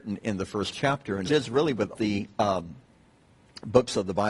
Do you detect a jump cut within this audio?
yes; 2 cuts; at 1.3 s, 1.9 s

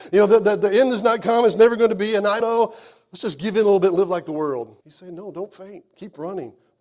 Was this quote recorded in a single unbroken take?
no; 2 cuts; at 2.4 s, 4.8 s

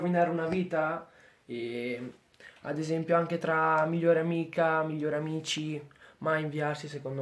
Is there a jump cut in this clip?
no; 0 cuts

